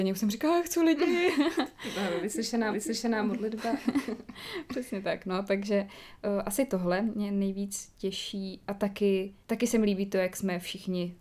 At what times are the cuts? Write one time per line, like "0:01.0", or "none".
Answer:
0:02.7
0:09.4